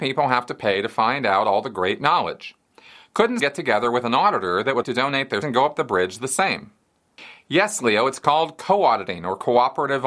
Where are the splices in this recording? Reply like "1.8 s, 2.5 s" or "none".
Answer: 3.4 s, 4.8 s, 5.4 s